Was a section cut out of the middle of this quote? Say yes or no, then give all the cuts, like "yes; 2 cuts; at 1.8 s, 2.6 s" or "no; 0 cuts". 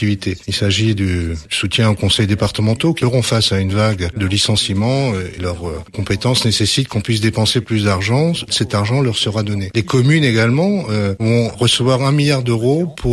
yes; 1 cut; at 5.4 s